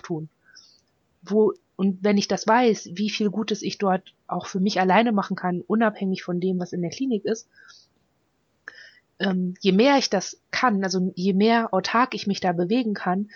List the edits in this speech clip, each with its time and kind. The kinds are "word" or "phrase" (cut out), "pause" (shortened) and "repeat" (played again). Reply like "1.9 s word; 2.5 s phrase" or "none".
none